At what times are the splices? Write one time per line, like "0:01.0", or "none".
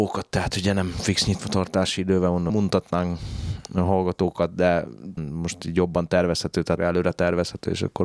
0:02.5
0:05.2
0:06.8